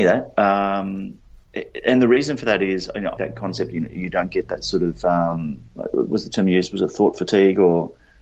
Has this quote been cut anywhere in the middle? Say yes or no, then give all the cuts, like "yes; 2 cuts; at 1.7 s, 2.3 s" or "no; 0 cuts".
yes; 2 cuts; at 3.2 s, 5.7 s